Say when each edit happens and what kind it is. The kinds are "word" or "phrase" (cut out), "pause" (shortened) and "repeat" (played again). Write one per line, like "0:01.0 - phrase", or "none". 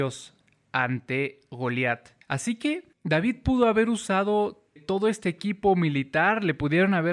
0:02.2 - pause
0:02.9 - pause
0:04.8 - word

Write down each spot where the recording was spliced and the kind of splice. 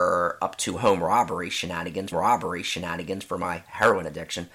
0:02.1 - repeat

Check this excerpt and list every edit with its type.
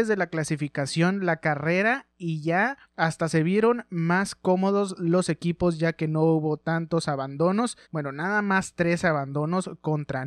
0:02.9 - pause
0:07.8 - pause

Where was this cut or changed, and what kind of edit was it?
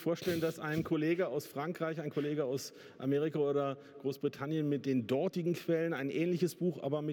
none

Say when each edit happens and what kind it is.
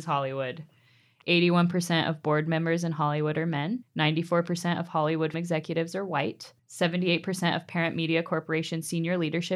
0:03.8 - pause
0:05.3 - word
0:06.6 - pause

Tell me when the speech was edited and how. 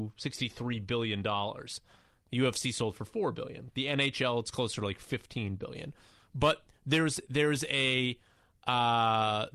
none

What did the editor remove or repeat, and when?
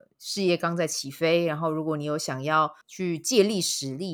0:02.8 - pause

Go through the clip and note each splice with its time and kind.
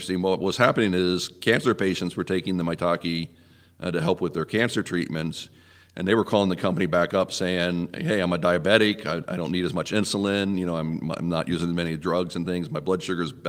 none

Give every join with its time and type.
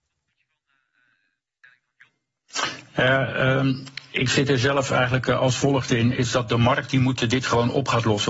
none

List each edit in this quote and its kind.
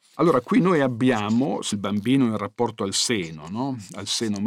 0:01.7 - word

